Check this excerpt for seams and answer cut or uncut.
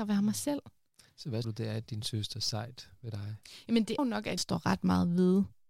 cut